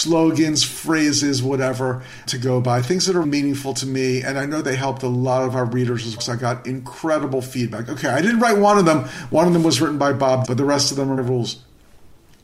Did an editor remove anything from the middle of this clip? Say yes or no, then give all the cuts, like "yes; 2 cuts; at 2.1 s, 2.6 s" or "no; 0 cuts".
yes; 5 cuts; at 2.3 s, 3.2 s, 6.2 s, 10.4 s, 11.2 s